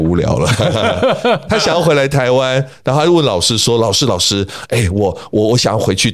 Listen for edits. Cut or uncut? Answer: uncut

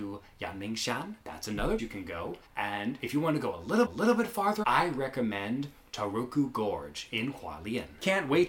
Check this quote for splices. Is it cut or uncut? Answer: cut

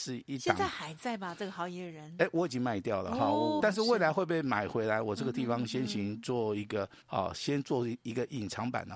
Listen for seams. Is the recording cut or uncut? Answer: cut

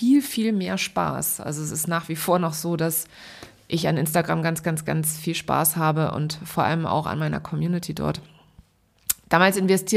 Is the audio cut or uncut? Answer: uncut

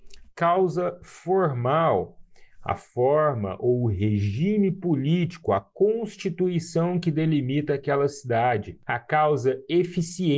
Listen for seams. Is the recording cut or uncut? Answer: uncut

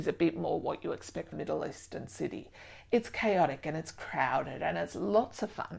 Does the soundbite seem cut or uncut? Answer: cut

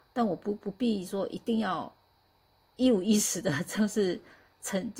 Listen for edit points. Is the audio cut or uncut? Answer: uncut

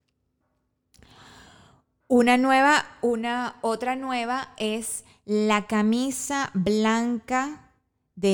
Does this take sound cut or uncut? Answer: uncut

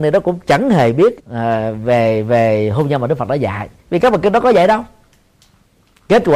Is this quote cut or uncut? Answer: cut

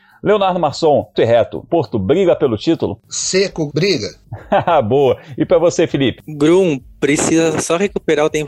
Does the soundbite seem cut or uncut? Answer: cut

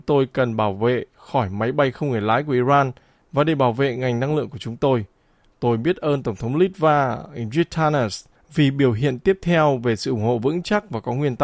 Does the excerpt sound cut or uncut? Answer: uncut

